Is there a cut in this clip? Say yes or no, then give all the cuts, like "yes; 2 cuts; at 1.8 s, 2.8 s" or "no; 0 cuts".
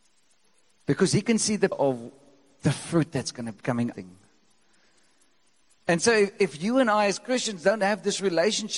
yes; 3 cuts; at 1.7 s, 3.6 s, 3.9 s